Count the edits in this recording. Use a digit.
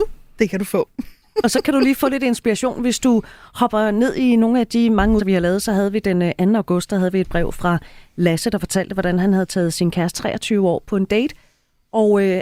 2